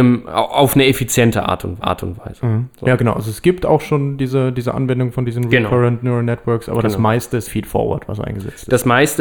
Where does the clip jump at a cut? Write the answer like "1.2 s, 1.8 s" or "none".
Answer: 1.8 s, 7.4 s